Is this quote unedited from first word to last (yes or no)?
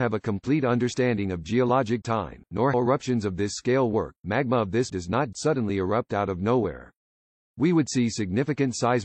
no